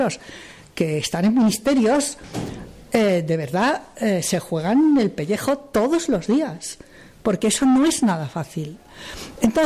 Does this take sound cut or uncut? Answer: uncut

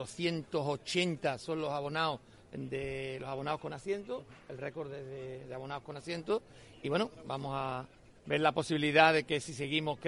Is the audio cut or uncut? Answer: uncut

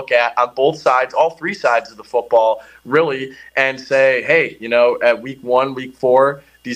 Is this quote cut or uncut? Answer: uncut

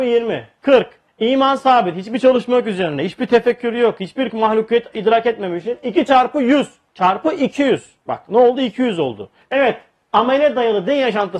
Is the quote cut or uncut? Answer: uncut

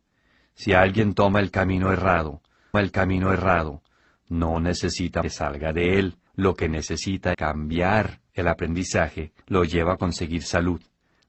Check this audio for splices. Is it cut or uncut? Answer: cut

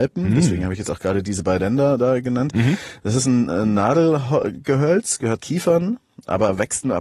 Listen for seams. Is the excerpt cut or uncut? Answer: cut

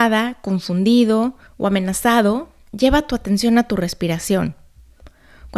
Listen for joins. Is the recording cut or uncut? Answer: cut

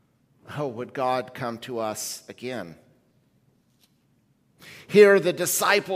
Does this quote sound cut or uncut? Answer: uncut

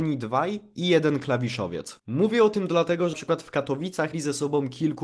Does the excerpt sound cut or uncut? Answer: cut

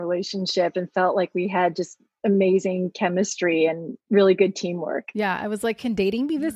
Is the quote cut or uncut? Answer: uncut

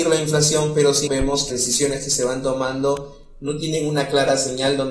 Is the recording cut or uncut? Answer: cut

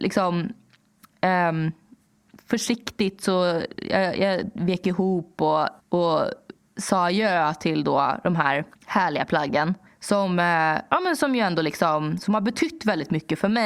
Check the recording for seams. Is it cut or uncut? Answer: cut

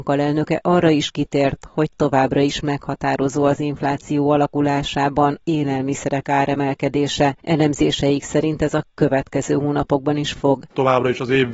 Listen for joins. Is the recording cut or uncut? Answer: cut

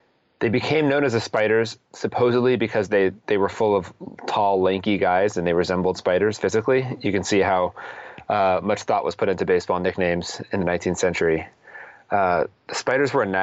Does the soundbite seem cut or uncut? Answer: cut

